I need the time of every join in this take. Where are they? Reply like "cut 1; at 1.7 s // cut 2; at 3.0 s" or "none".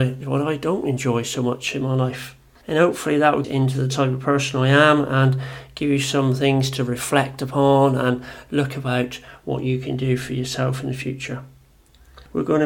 cut 1; at 3.4 s